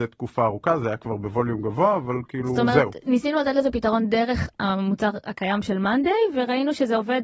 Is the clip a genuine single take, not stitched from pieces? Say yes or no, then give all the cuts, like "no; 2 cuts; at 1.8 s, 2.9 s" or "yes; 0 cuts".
yes; 0 cuts